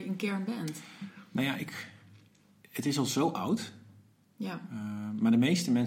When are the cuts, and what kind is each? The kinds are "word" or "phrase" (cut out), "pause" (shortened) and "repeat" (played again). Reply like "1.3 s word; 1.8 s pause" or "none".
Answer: none